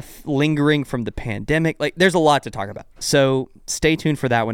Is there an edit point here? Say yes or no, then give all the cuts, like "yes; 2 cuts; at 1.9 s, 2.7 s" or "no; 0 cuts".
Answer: no; 0 cuts